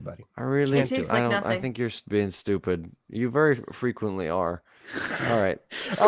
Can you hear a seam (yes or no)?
no